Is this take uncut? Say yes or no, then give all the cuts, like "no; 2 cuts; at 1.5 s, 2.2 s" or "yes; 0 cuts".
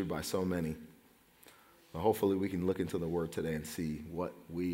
yes; 0 cuts